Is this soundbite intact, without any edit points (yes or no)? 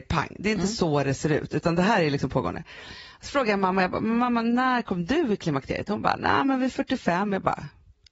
yes